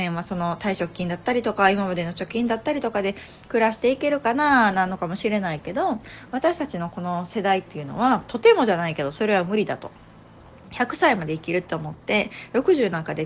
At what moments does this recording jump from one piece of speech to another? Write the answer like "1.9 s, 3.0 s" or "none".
none